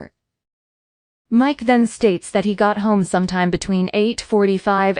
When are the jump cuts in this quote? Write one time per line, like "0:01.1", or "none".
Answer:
none